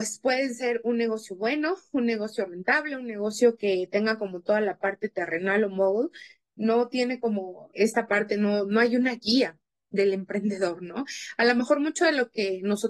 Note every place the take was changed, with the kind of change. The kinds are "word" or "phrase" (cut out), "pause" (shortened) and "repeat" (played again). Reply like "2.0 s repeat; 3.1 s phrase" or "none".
7.8 s word